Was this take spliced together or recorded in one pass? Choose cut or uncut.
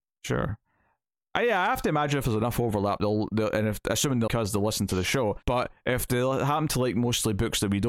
cut